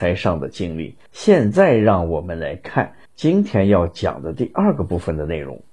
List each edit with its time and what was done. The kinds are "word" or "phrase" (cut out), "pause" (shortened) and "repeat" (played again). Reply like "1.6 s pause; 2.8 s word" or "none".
1.1 s pause; 3.1 s pause

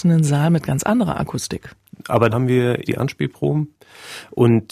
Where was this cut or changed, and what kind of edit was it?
2.3 s word; 2.9 s word

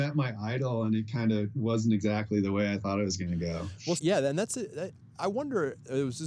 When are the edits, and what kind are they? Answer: 4.0 s word

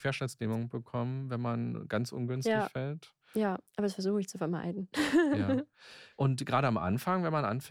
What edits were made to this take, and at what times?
3.7 s pause; 6.1 s pause

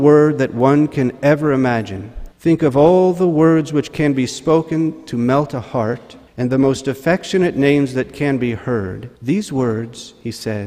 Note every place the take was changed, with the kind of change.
2.3 s pause; 6.3 s pause; 9.2 s pause

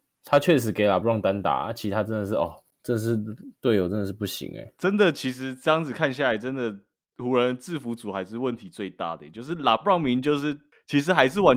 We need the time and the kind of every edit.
none

